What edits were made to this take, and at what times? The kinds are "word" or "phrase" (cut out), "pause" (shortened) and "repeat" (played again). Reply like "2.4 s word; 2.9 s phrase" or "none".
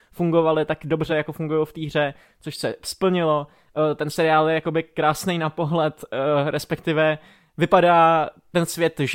none

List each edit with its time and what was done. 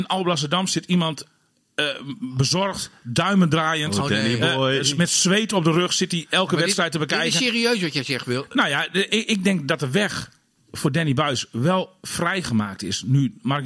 none

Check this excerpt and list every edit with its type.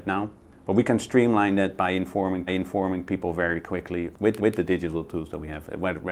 2.5 s repeat; 4.4 s repeat

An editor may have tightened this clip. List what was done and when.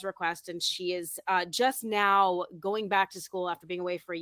none

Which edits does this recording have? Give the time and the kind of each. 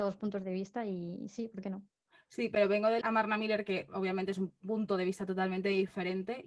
3.0 s word

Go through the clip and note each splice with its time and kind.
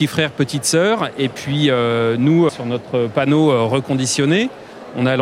2.5 s phrase

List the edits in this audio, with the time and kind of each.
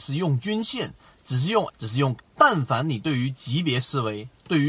1.7 s word; 2.2 s word

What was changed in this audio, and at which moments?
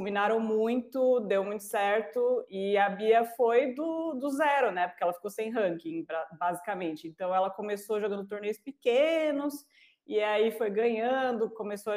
none

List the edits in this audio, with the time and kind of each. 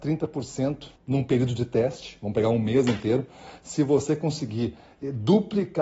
1.0 s pause

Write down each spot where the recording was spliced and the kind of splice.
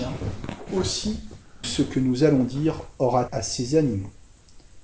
1.6 s word; 3.3 s word

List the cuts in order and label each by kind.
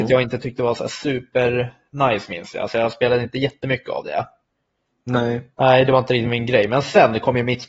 none

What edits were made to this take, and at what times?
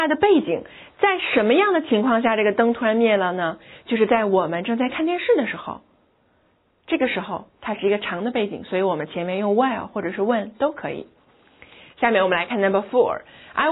none

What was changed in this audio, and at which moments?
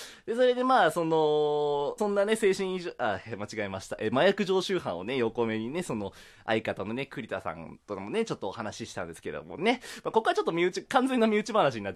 2.0 s word

